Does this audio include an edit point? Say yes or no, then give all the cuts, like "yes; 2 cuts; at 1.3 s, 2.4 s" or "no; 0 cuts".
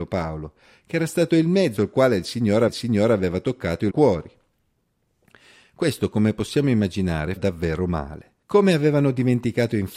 yes; 5 cuts; at 1.8 s, 2.7 s, 3.9 s, 7.4 s, 8.4 s